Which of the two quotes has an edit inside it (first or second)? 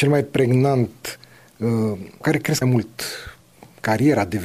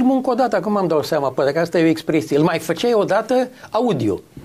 first